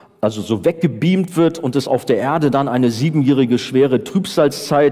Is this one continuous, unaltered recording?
yes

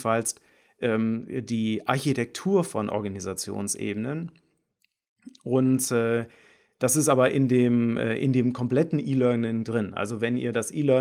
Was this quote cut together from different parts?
no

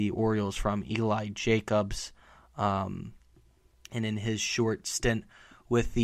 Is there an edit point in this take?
no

